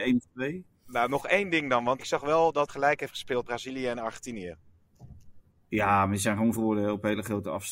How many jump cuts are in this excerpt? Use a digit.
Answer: 5